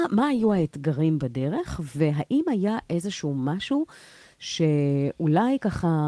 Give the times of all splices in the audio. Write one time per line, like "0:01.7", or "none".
none